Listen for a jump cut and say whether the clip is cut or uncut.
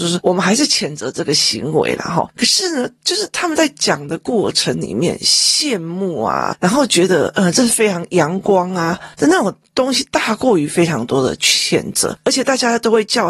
cut